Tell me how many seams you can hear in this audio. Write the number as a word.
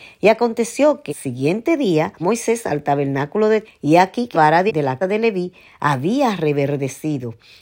six